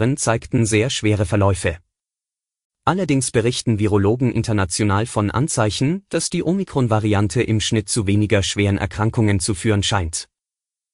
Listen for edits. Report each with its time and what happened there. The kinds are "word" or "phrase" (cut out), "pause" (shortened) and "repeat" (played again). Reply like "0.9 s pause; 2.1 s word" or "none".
none